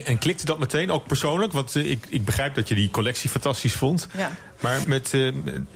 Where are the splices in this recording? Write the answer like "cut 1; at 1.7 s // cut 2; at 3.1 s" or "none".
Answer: cut 1; at 4.8 s